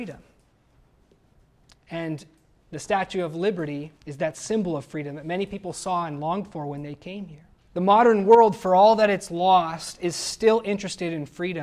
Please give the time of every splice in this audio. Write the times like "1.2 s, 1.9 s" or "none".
4.0 s, 7.5 s